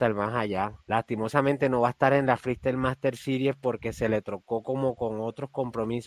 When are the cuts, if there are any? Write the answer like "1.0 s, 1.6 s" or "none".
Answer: none